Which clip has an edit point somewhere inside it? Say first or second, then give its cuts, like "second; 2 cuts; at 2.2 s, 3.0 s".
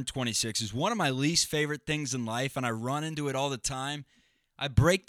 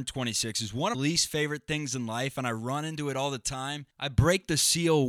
second; 2 cuts; at 0.9 s, 3.9 s